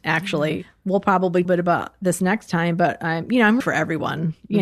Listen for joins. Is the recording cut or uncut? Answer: cut